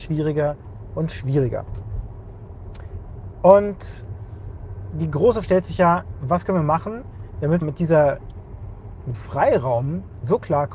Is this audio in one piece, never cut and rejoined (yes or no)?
no